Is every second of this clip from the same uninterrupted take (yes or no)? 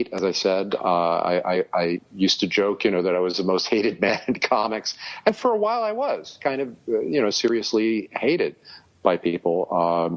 yes